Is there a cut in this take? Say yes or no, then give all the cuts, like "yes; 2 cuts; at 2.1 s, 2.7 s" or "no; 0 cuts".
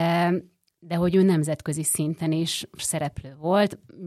yes; 1 cut; at 2.8 s